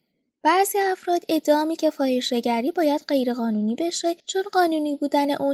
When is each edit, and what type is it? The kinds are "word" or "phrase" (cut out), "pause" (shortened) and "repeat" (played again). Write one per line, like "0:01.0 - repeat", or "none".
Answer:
0:01.8 - word
0:04.2 - pause